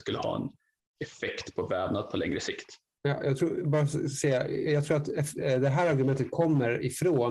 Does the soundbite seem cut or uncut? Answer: uncut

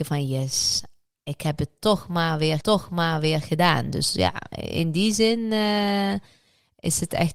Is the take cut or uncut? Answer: cut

